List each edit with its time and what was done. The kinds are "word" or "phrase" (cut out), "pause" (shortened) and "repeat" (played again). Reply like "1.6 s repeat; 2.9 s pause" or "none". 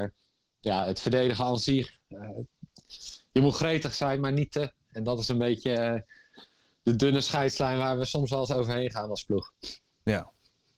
none

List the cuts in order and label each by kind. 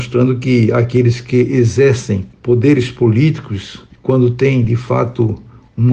2.3 s pause; 3.9 s pause

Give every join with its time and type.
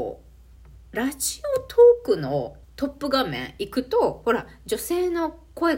2.6 s pause

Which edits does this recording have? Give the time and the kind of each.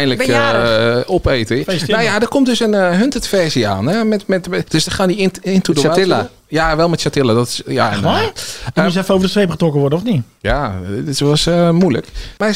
none

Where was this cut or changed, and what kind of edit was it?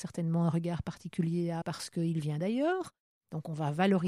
1.6 s word

